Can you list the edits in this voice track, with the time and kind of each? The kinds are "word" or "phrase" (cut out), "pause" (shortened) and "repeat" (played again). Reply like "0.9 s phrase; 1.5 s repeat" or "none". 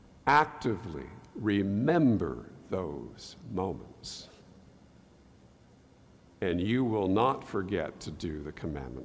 none